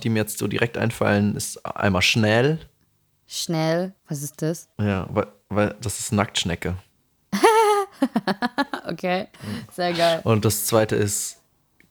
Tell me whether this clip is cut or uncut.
cut